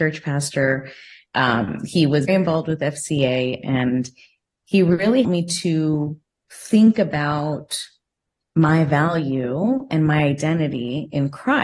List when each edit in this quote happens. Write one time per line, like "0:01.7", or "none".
0:02.3
0:05.2